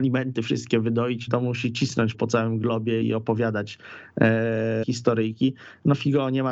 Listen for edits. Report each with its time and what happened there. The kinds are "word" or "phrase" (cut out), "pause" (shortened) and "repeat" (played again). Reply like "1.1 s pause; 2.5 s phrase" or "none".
1.3 s word; 2.1 s word; 3.0 s word; 4.8 s word

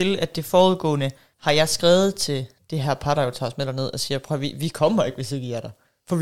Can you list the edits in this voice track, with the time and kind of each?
none

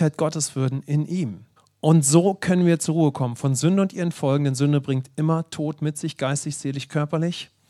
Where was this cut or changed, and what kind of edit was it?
1.6 s pause

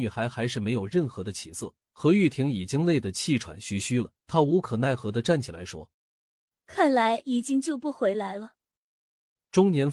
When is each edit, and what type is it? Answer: 1.8 s pause; 4.2 s pause; 5.9 s pause

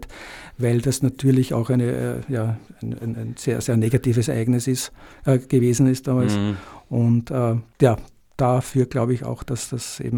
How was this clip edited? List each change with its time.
7.7 s pause

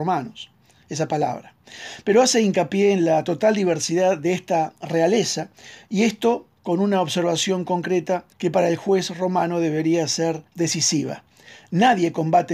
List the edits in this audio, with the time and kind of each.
6.6 s pause; 8.3 s pause; 10.5 s pause

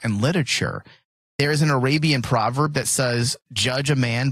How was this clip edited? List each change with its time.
none

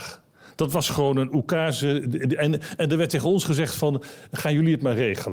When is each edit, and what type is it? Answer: none

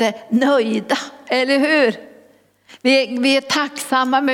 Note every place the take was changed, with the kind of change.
none

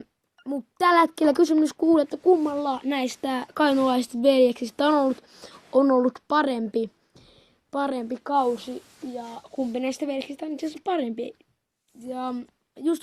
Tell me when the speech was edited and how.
none

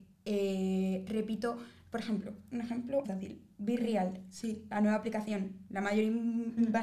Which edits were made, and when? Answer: 3.0 s word

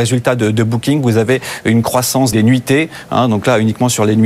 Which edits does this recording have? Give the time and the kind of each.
2.3 s word

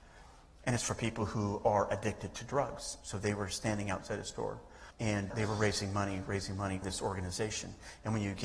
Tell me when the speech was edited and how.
4.9 s pause; 6.8 s word

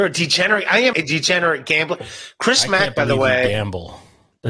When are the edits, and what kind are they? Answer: 0.9 s word

